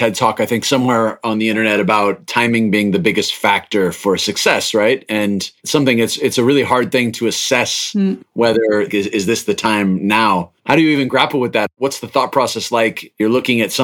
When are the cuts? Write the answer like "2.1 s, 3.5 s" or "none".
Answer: 5.6 s, 10.6 s